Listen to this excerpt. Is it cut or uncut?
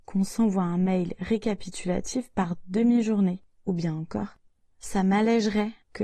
uncut